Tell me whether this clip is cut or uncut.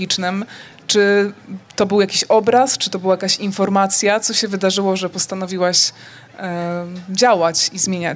uncut